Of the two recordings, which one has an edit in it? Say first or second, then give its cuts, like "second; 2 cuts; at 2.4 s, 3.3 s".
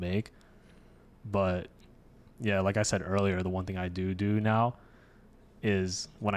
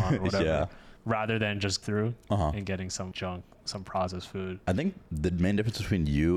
second; 5 cuts; at 1.0 s, 1.8 s, 3.1 s, 4.6 s, 5.1 s